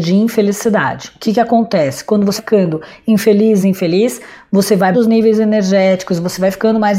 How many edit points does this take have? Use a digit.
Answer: 3